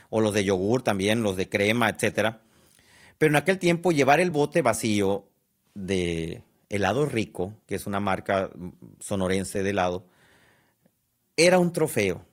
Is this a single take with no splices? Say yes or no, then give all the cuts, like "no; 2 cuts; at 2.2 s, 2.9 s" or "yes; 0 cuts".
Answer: yes; 0 cuts